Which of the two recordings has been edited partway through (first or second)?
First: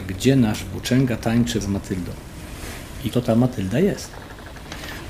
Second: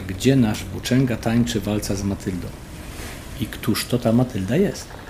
first